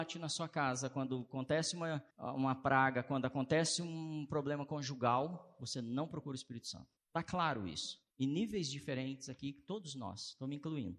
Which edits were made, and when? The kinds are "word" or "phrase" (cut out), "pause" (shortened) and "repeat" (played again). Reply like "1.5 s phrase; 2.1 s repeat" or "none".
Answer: 2.1 s pause; 7.0 s pause; 8.1 s pause

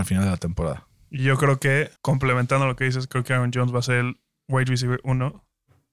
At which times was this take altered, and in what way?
2.0 s pause

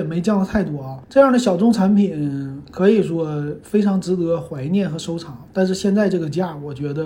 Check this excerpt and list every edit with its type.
1.0 s pause

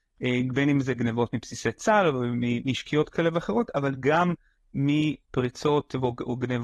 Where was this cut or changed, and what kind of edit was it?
none

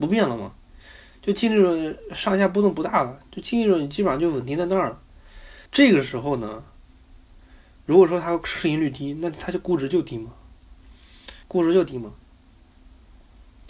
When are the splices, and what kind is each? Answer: 5.7 s pause; 11.4 s pause

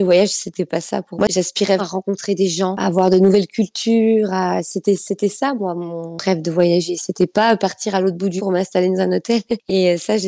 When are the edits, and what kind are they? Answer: 1.1 s word; 1.8 s word; 8.4 s word

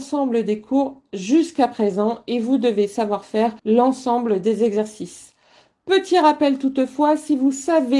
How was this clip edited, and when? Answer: 3.6 s pause

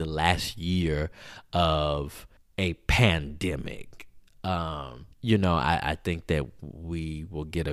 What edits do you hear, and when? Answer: 2.4 s pause; 5.1 s pause

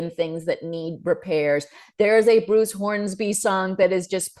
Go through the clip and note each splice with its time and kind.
none

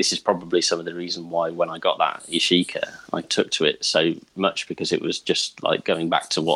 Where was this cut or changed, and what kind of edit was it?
3.2 s word

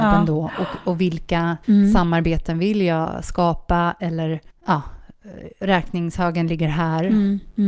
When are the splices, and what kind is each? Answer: 1.6 s pause; 4.5 s pause

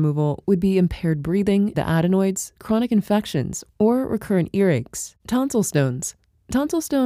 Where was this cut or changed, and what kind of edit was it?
1.7 s phrase; 5.2 s pause

